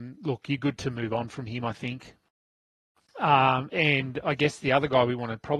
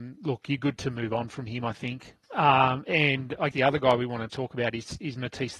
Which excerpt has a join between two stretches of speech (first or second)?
second